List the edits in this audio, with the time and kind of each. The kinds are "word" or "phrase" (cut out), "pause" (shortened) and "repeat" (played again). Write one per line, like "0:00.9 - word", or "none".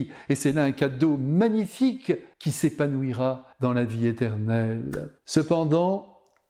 0:02.3 - pause
0:03.5 - pause
0:05.2 - pause